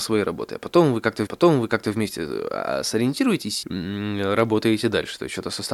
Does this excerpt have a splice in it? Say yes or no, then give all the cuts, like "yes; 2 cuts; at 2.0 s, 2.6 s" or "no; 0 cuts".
yes; 2 cuts; at 1.3 s, 3.6 s